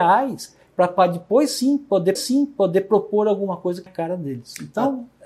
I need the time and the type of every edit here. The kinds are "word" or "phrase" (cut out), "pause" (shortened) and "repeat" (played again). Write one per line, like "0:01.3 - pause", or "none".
0:02.2 - repeat
0:03.9 - word